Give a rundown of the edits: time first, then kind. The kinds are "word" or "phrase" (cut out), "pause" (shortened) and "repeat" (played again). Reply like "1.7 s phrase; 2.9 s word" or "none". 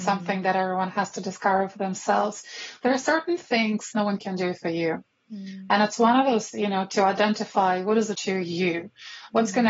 3.9 s word; 6.5 s word; 8.1 s word